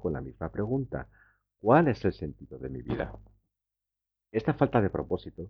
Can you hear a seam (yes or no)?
no